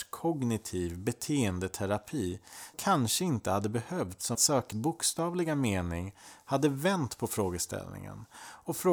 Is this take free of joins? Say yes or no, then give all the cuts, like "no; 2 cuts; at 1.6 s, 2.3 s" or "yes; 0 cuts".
no; 3 cuts; at 2.7 s, 4.3 s, 4.7 s